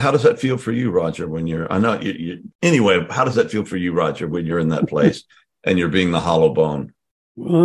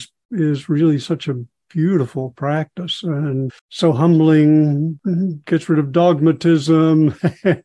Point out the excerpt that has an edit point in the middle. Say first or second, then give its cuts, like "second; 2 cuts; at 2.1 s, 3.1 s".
second; 1 cut; at 3.6 s